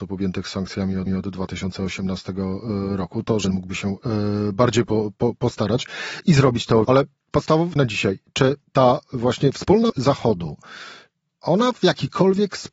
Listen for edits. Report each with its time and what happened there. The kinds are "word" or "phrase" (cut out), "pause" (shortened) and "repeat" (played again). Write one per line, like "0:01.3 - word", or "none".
0:01.1 - repeat
0:03.4 - word
0:06.8 - phrase
0:07.8 - phrase
0:08.6 - pause
0:09.9 - word
0:11.3 - word